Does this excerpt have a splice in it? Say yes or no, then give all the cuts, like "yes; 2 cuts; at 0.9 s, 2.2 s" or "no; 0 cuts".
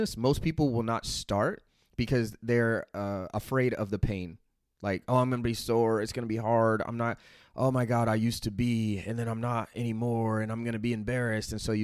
no; 0 cuts